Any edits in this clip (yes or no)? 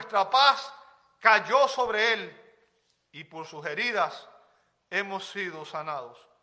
no